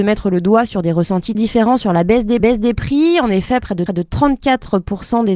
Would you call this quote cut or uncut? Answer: cut